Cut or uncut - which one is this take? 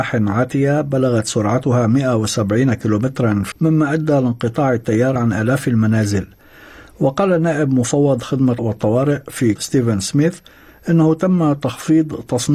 cut